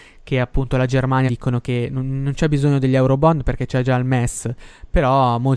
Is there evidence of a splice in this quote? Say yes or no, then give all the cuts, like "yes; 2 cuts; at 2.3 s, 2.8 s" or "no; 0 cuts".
yes; 1 cut; at 1.3 s